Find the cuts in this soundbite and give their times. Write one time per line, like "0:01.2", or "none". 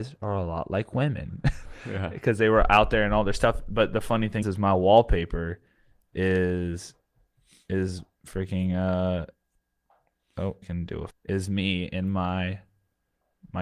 0:04.4
0:10.6
0:11.1